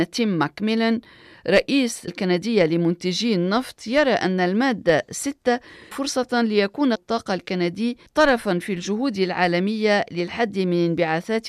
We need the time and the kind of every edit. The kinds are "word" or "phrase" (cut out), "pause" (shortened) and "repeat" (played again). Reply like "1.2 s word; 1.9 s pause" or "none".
2.1 s word; 5.9 s word; 7.0 s word; 8.1 s pause